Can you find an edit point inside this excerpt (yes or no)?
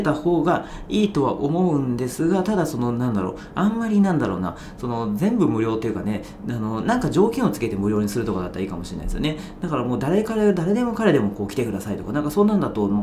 no